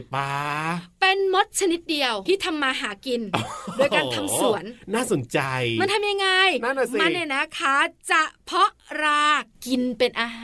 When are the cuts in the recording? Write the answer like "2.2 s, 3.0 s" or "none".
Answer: 2.3 s